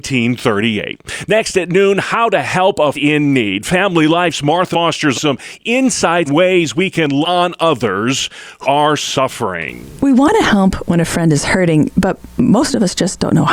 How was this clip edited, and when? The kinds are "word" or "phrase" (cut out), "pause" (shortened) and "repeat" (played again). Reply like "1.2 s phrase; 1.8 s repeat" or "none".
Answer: 2.9 s word; 4.7 s word; 5.1 s word; 6.3 s word; 7.2 s word; 8.6 s word